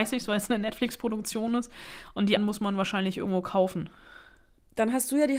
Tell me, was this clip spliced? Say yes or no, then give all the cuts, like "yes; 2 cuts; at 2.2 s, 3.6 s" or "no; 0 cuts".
yes; 1 cut; at 2.4 s